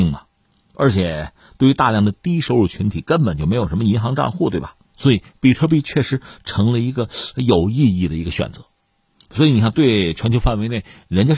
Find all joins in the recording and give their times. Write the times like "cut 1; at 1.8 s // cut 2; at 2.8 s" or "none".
cut 1; at 4.8 s